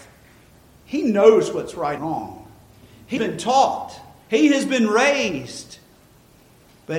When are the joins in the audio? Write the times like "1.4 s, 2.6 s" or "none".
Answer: 2.0 s, 3.2 s